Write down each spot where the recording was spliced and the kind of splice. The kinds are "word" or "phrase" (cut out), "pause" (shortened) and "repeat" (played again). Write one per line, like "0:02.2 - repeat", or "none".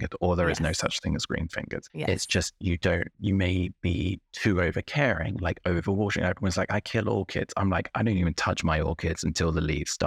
0:01.9 - pause
0:03.1 - pause